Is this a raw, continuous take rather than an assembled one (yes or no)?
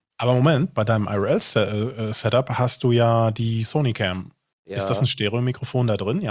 yes